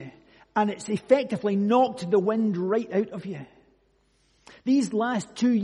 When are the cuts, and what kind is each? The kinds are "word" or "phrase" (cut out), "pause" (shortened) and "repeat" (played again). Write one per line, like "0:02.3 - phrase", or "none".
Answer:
none